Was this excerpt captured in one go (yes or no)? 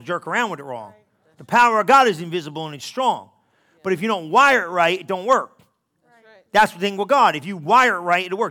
yes